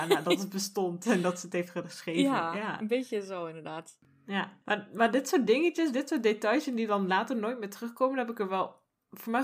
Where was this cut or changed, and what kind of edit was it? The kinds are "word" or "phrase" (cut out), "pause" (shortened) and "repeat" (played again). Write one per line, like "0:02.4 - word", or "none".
none